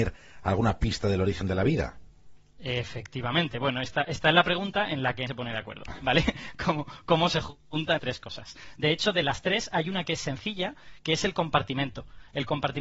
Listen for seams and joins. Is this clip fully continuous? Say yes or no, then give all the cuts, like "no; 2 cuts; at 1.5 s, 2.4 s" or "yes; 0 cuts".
no; 2 cuts; at 5.3 s, 8.0 s